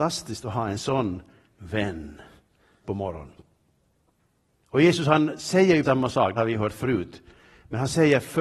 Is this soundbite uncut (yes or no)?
no